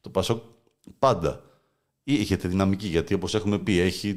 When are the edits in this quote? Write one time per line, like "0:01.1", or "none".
none